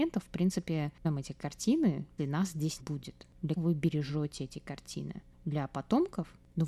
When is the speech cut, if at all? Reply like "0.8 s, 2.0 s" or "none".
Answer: 1.0 s, 2.2 s, 2.8 s, 3.6 s

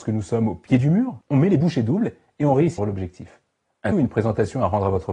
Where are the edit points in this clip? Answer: 1.2 s, 2.8 s, 3.9 s

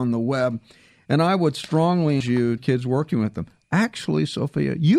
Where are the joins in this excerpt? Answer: 2.2 s, 2.6 s

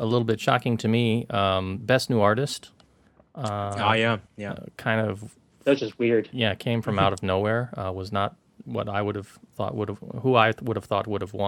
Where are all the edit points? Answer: 4.3 s

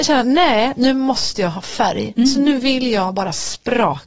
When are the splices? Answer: none

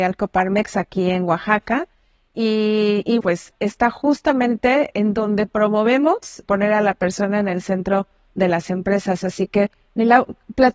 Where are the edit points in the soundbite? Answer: 3.2 s, 3.5 s, 4.9 s, 6.4 s

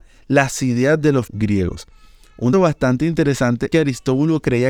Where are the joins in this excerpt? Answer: 1.3 s, 2.5 s, 3.7 s

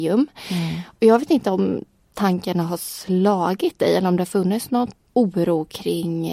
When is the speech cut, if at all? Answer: none

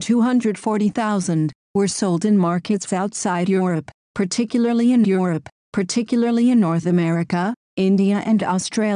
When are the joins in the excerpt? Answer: 5.0 s

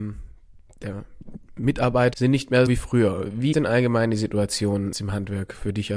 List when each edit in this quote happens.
2.1 s, 2.7 s, 3.5 s, 4.9 s

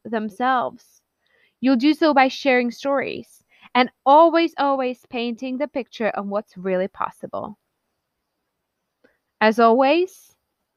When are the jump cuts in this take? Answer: none

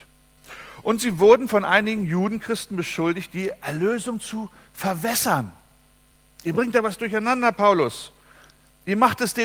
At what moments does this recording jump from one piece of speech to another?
6.1 s

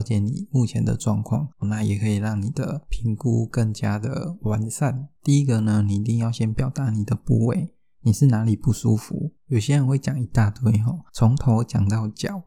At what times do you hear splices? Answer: 1.5 s, 5.2 s, 9.4 s, 11.1 s

